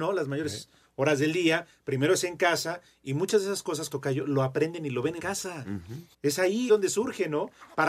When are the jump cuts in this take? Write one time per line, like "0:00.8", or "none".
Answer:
0:03.9
0:05.2
0:06.1
0:06.7